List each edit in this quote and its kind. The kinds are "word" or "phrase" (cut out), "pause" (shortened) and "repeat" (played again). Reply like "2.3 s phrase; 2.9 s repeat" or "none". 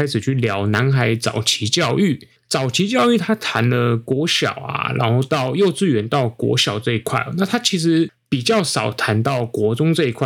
2.4 s pause